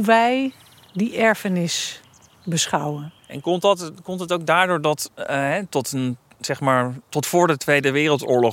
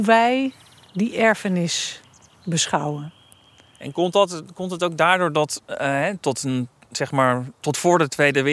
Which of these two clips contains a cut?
first; 1 cut; at 3.2 s

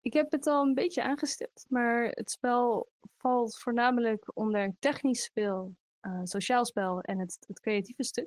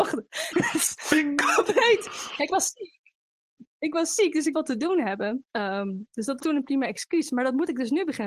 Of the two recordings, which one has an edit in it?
second; 5 cuts; at 2.5 s, 3.7 s, 4.5 s, 5.5 s, 6.4 s

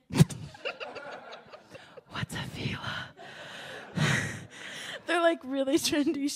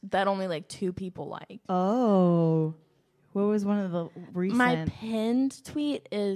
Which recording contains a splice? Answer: second; 1 cut; at 1.7 s

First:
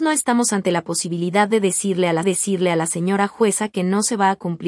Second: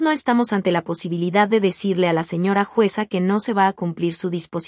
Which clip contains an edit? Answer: first; 1 cut; at 2.2 s

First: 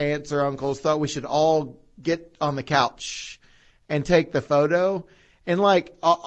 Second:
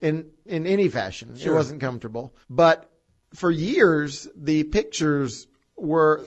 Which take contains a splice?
second; 1 cut; at 2.4 s

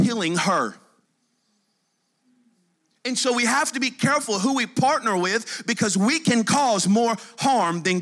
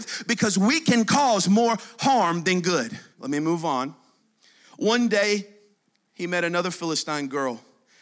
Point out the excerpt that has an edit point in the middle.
second; 1 cut; at 3.1 s

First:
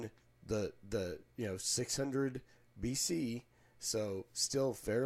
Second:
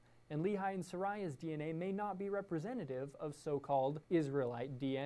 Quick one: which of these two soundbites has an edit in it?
second; 1 cut; at 4.0 s

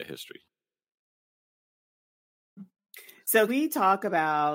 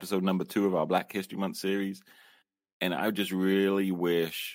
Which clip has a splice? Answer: first; 1 cut; at 3.5 s

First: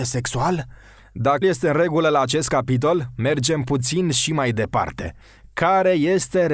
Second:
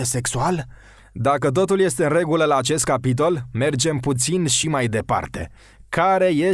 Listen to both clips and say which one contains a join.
first; 1 cut; at 1.4 s

